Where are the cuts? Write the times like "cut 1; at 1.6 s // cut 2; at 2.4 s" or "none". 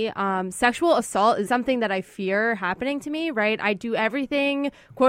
cut 1; at 1.5 s